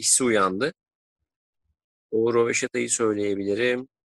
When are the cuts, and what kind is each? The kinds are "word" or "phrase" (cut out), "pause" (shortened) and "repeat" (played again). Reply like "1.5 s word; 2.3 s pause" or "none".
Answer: none